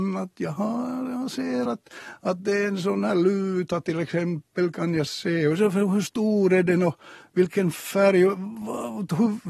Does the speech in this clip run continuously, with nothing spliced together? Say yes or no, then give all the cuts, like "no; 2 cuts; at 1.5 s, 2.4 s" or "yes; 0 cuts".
yes; 0 cuts